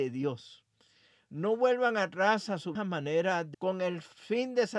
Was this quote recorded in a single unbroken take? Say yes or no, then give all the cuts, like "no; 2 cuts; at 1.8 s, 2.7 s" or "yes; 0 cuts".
no; 2 cuts; at 2.8 s, 3.5 s